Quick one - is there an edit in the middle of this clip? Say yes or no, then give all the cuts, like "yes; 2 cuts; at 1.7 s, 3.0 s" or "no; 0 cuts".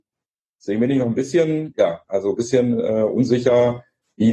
no; 0 cuts